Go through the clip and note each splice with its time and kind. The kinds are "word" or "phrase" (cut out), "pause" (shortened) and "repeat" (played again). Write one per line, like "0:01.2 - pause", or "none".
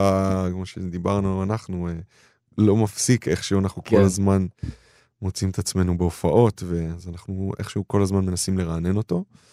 none